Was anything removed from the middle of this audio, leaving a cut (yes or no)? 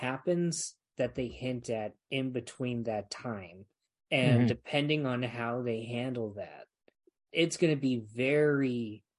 no